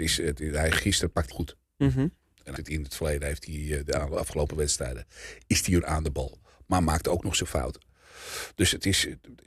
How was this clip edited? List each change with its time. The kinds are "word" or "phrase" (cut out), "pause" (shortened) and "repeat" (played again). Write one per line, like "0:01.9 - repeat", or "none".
0:01.3 - phrase
0:02.6 - word
0:05.8 - word